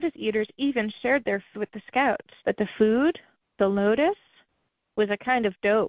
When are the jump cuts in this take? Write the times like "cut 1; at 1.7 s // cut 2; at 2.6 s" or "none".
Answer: cut 1; at 1.5 s // cut 2; at 2.4 s // cut 3; at 3.4 s

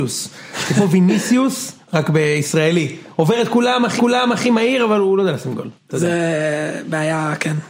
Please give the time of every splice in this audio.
cut 1; at 4.0 s // cut 2; at 5.8 s

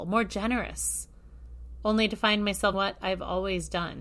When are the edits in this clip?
cut 1; at 2.7 s

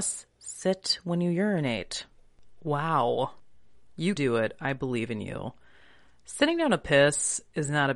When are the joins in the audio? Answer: cut 1; at 4.2 s

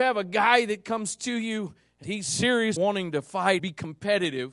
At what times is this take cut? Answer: cut 1; at 2.0 s // cut 2; at 2.8 s // cut 3; at 3.6 s

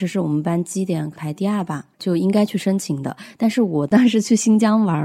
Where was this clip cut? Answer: cut 1; at 1.9 s

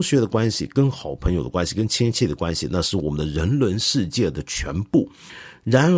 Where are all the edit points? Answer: none

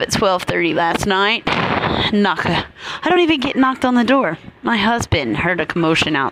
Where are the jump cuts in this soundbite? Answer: none

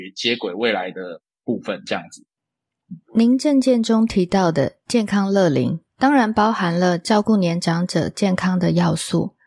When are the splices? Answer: cut 1; at 1.4 s // cut 2; at 3.0 s // cut 3; at 5.9 s

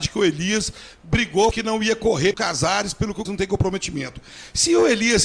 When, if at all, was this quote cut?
cut 1; at 1.5 s // cut 2; at 2.3 s // cut 3; at 3.3 s

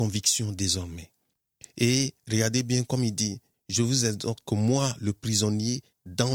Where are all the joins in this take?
cut 1; at 4.4 s

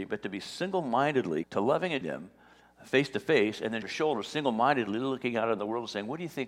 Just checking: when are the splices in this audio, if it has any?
cut 1; at 1.4 s // cut 2; at 2.0 s // cut 3; at 3.8 s

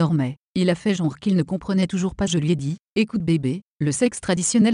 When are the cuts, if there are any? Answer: cut 1; at 2.3 s

